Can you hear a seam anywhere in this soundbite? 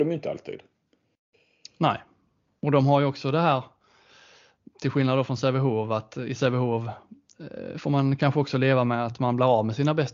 no; 0 cuts

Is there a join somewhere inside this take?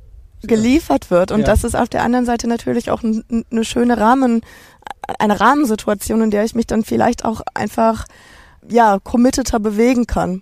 no; 0 cuts

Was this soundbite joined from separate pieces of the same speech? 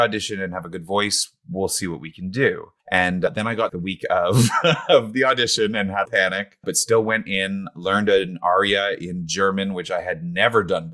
yes; 3 cuts; at 2.8 s, 3.7 s, 6.1 s

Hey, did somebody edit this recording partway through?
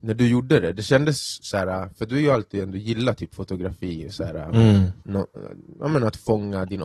yes; 1 cut; at 5.0 s

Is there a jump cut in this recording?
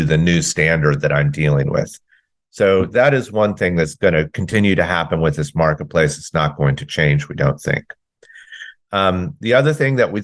no; 0 cuts

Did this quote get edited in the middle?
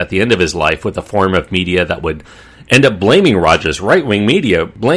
no; 0 cuts

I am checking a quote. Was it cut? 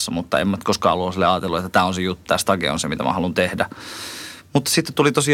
yes; 1 cut; at 2.3 s

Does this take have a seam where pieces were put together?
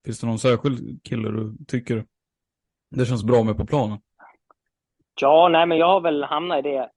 no; 0 cuts

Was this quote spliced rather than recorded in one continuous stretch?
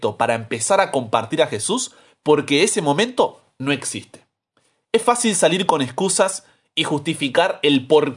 no; 0 cuts

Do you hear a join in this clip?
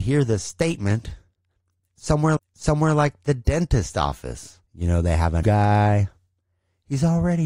yes; 3 cuts; at 2.4 s, 4.7 s, 5.4 s

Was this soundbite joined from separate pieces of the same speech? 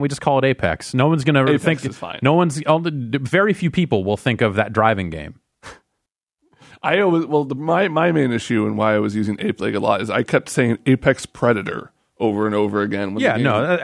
no; 0 cuts

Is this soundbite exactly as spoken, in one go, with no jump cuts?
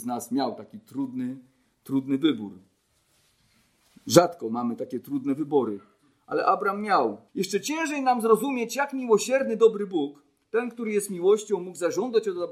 no; 1 cut; at 7.3 s

